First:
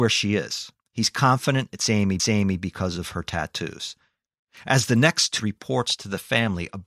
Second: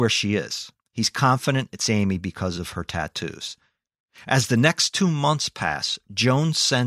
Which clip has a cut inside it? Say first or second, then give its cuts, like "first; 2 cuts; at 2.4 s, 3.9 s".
first; 2 cuts; at 2.2 s, 5.4 s